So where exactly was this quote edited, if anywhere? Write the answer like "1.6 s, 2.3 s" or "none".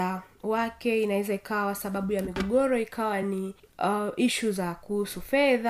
none